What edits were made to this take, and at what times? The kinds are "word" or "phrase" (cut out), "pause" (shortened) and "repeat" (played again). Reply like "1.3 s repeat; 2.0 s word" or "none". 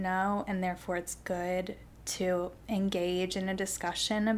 none